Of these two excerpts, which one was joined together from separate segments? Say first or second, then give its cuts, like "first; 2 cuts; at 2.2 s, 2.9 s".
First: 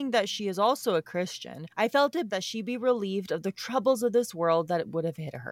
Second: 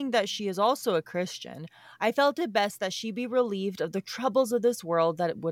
first; 2 cuts; at 1.7 s, 2.3 s